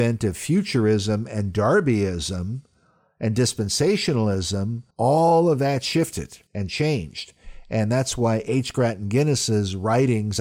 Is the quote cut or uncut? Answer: cut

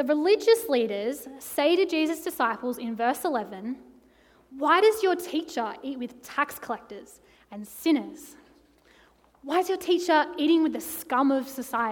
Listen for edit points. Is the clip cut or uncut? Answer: uncut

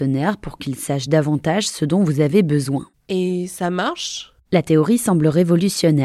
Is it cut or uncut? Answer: uncut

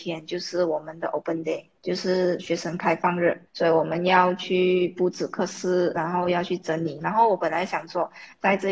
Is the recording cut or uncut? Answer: cut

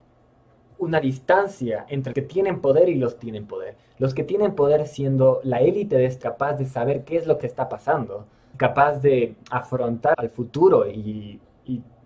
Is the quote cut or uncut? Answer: cut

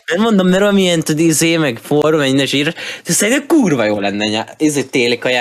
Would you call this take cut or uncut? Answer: uncut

